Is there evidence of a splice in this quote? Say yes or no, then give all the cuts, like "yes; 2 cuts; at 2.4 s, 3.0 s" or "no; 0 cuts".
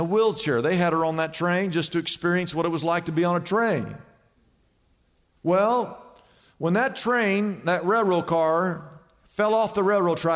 no; 0 cuts